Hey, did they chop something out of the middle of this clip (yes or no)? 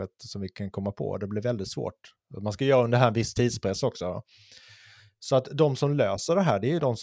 no